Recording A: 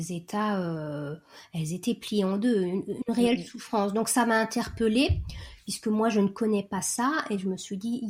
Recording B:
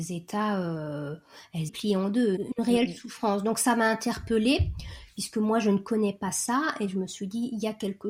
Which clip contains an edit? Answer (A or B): B